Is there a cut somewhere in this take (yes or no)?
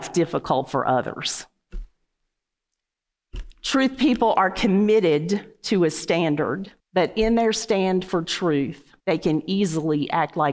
yes